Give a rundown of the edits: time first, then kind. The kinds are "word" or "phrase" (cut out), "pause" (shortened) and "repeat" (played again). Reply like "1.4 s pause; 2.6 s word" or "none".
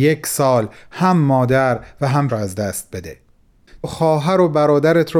2.3 s word; 3.8 s word